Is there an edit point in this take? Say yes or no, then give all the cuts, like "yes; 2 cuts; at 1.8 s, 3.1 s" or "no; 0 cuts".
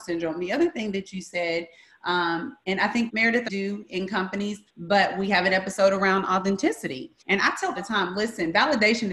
yes; 5 cuts; at 3.1 s, 3.5 s, 4.7 s, 7.2 s, 7.7 s